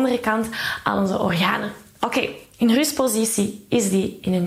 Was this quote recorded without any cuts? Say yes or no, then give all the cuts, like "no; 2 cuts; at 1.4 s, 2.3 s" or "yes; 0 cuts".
yes; 0 cuts